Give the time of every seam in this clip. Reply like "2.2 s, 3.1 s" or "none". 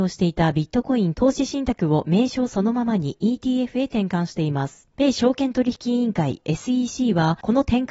none